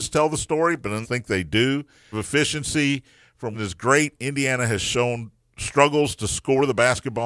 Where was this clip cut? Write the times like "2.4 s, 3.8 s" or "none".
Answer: 1.0 s, 2.1 s, 3.5 s, 5.4 s